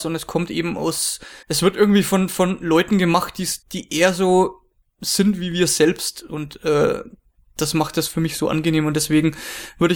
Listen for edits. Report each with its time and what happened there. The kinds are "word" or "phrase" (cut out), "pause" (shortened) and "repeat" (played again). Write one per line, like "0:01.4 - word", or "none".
0:01.4 - pause
0:03.6 - pause